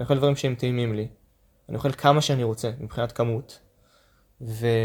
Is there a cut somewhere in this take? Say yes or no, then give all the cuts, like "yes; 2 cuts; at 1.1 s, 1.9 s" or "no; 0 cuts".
no; 0 cuts